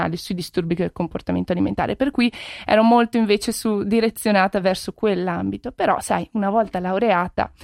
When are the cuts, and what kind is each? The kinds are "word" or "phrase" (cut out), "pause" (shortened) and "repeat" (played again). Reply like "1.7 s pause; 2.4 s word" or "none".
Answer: none